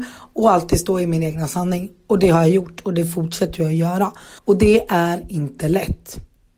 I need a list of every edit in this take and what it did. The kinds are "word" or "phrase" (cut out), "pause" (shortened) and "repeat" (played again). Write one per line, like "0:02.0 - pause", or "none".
0:04.4 - pause